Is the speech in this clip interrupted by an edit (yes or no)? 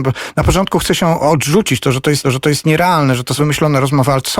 yes